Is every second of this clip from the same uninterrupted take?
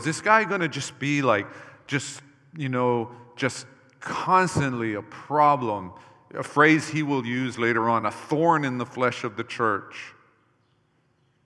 yes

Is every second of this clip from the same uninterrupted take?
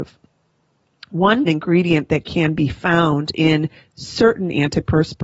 no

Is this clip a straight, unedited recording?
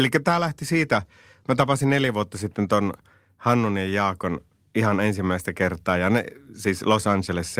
yes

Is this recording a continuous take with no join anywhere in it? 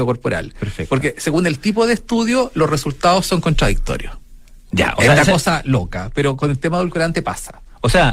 yes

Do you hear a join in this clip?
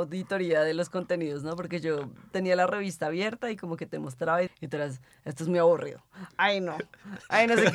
yes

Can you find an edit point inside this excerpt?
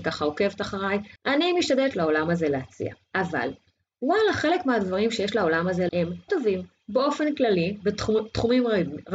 yes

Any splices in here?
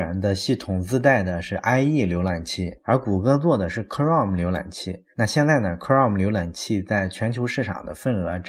no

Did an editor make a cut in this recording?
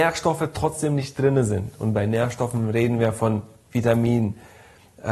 no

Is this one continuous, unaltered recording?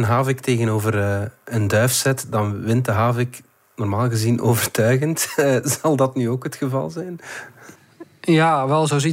yes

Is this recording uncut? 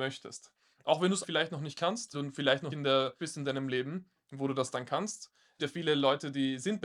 no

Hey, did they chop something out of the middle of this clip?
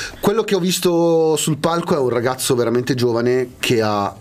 no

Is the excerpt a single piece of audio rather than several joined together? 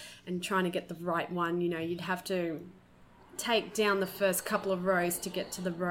yes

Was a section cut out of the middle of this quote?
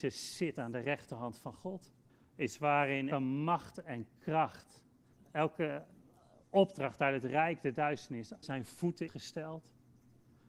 yes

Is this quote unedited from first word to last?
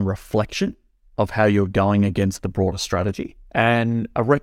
yes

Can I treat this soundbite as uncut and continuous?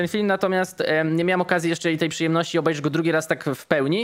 yes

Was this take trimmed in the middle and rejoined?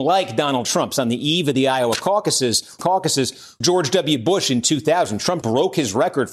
yes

